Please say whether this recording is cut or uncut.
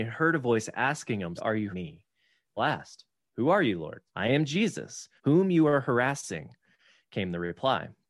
cut